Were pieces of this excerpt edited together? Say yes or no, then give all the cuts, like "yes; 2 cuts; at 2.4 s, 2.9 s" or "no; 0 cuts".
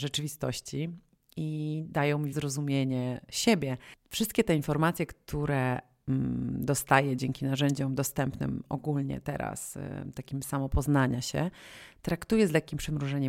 yes; 1 cut; at 2.3 s